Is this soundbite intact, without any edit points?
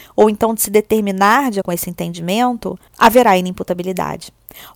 no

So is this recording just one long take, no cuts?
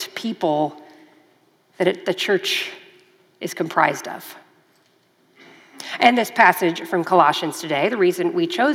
yes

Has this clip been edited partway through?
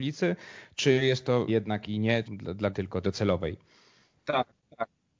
yes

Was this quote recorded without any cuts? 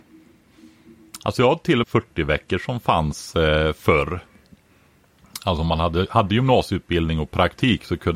no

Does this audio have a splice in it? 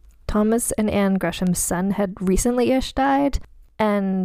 no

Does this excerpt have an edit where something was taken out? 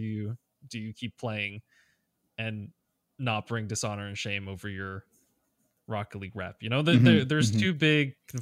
no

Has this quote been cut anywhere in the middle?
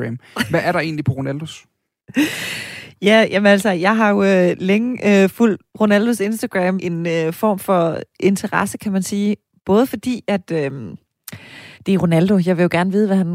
yes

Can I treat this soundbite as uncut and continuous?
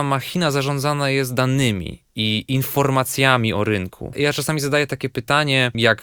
yes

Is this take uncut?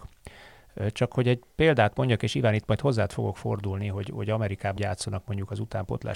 no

